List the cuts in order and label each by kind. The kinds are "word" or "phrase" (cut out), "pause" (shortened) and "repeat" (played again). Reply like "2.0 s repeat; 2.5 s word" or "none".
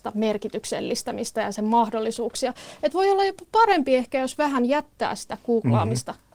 none